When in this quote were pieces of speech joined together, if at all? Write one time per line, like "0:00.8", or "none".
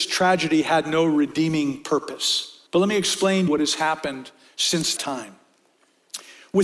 0:02.7
0:03.5
0:05.0